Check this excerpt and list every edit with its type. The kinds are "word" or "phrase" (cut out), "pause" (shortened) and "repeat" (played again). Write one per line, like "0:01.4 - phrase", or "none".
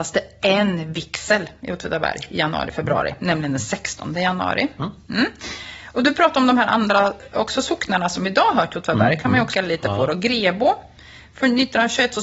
0:09.5 - word